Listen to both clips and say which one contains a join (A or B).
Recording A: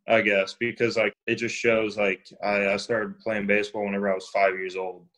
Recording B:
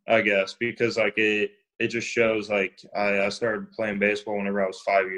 A